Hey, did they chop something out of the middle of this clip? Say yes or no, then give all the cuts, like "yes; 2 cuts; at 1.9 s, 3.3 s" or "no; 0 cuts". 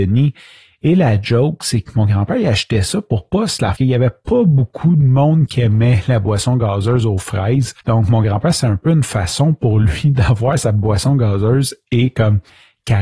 yes; 2 cuts; at 3.8 s, 7.8 s